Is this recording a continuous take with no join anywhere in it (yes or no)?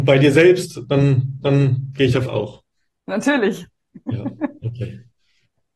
no